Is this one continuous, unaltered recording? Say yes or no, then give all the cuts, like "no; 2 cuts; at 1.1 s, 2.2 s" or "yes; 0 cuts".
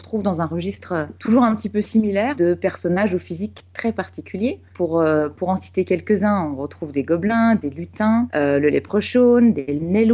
yes; 0 cuts